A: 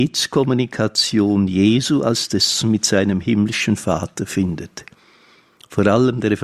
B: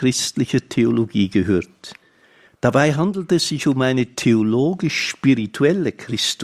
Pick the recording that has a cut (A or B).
A